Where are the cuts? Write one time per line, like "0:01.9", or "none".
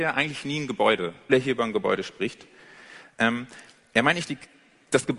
0:01.3